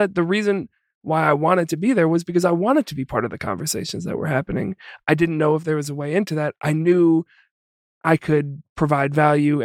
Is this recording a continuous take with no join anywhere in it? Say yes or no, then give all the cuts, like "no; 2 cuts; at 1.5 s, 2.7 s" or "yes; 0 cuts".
yes; 0 cuts